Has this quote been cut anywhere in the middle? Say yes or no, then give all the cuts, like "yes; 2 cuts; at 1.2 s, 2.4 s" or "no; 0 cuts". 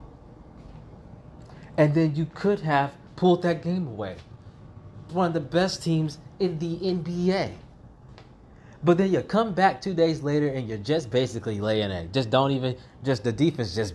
yes; 1 cut; at 5.1 s